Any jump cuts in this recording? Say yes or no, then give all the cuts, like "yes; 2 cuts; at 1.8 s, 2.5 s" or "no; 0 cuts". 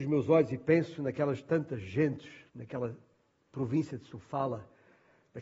yes; 1 cut; at 2.5 s